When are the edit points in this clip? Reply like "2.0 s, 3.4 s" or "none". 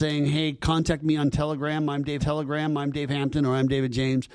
2.2 s

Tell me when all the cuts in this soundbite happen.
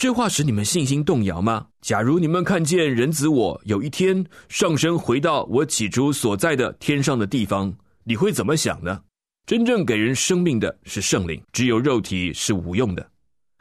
1.7 s, 9.3 s, 11.4 s

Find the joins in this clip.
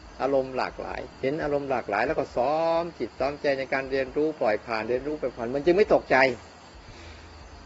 1.1 s

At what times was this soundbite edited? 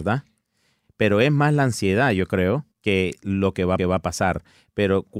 2.7 s, 3.8 s

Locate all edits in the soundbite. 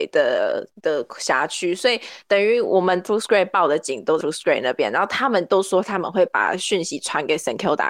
3.1 s, 4.2 s

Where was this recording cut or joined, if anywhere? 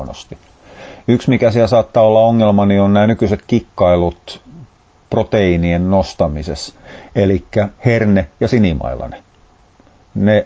none

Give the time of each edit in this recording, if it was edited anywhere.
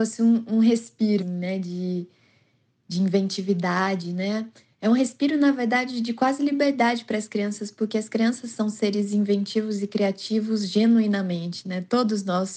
1.2 s

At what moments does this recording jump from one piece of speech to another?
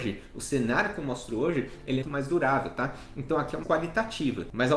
2.0 s, 3.6 s

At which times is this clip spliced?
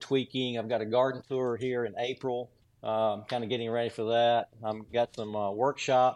2.6 s

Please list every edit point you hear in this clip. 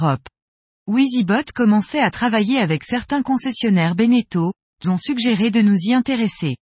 4.8 s

